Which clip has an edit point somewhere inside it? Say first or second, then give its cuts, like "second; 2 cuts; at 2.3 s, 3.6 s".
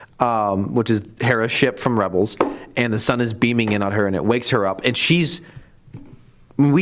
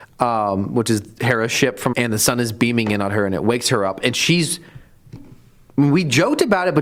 second; 1 cut; at 1.9 s